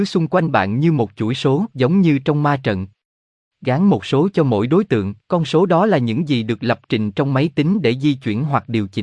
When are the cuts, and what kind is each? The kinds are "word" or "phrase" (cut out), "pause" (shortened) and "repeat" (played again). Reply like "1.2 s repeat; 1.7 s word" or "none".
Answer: 1.7 s pause; 5.2 s pause